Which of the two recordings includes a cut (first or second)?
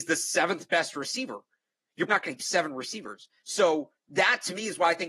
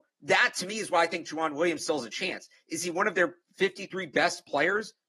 first